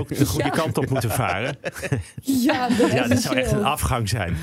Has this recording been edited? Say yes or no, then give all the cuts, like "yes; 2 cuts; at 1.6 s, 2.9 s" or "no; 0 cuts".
yes; 1 cut; at 2.9 s